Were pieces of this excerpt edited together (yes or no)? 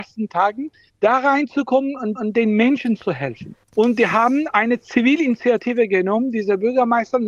yes